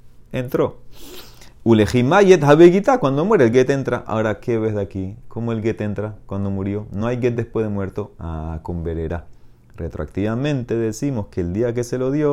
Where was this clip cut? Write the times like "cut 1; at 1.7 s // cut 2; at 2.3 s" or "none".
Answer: none

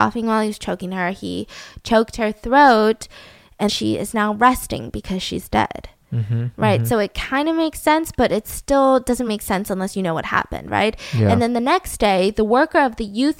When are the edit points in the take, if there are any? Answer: cut 1; at 3.7 s // cut 2; at 9.3 s

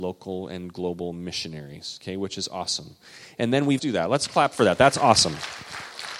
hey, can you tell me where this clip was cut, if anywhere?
cut 1; at 3.8 s

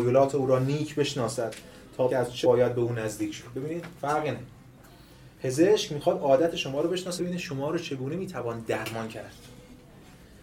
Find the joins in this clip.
cut 1; at 2.1 s // cut 2; at 2.4 s // cut 3; at 5.3 s // cut 4; at 7.2 s

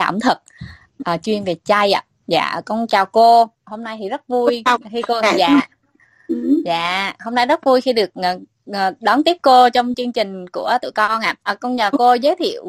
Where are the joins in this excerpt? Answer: cut 1; at 11.4 s

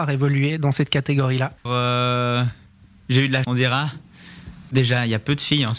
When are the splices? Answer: cut 1; at 1.6 s // cut 2; at 3.4 s

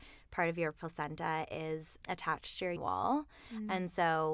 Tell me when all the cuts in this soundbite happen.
cut 1; at 2.0 s // cut 2; at 2.8 s

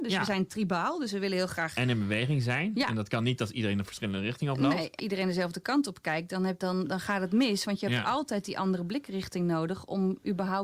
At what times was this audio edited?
cut 1; at 5.0 s // cut 2; at 6.6 s

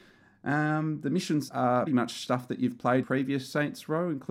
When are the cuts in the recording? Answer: cut 1; at 1.5 s // cut 2; at 1.9 s // cut 3; at 3.0 s

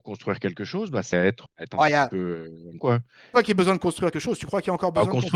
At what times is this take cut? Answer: cut 1; at 1.1 s // cut 2; at 1.5 s // cut 3; at 2.8 s // cut 4; at 3.3 s // cut 5; at 4.1 s

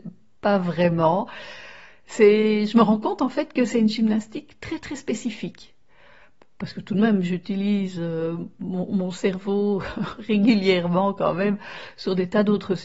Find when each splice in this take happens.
none

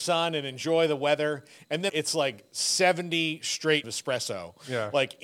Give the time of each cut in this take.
cut 1; at 1.9 s // cut 2; at 3.8 s

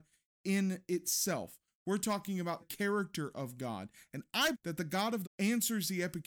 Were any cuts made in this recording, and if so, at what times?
cut 1; at 2.6 s // cut 2; at 4.5 s // cut 3; at 5.2 s

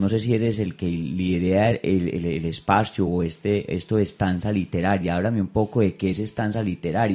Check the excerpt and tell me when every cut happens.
none

